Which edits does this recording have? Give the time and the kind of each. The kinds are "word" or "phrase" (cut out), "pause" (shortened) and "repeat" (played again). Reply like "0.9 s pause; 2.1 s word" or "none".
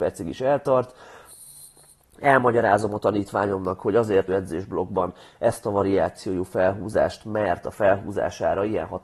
4.3 s phrase